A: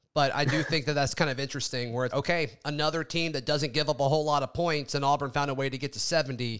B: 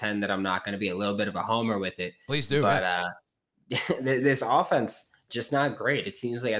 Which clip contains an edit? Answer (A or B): A